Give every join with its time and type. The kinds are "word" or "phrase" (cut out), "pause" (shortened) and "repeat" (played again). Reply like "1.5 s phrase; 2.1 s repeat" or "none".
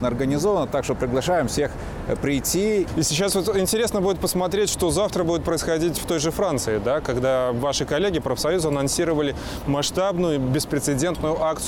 none